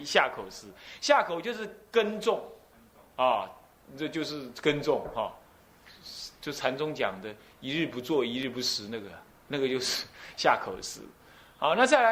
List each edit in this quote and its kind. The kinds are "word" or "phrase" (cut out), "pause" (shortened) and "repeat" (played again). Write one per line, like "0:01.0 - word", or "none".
none